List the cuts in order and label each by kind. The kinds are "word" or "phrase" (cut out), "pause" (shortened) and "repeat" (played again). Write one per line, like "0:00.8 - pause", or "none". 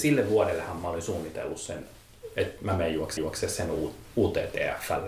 0:03.2 - repeat